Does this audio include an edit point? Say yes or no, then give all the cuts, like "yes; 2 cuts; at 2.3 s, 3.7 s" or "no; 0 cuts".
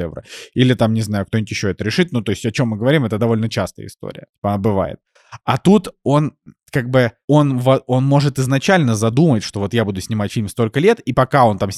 no; 0 cuts